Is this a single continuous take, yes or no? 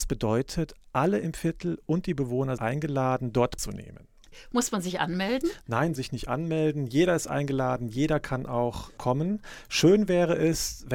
no